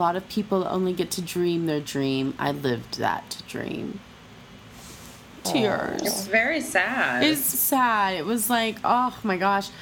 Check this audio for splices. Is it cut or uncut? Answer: cut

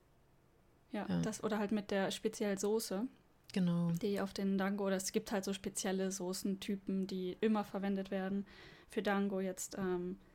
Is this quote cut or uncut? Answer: uncut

